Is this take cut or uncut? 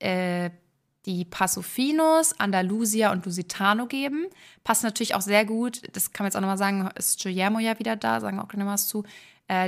uncut